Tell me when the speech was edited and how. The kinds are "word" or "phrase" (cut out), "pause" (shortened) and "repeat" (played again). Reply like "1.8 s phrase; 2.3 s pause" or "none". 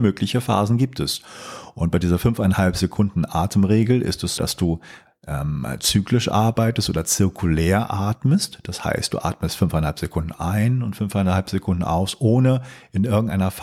4.4 s word